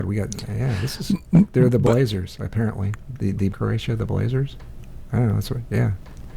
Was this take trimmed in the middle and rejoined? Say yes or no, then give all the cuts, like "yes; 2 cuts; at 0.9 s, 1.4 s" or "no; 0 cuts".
yes; 1 cut; at 3.5 s